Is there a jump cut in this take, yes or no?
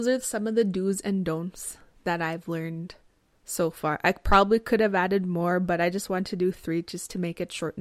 no